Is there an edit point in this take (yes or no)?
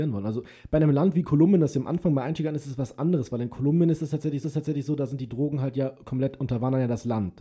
yes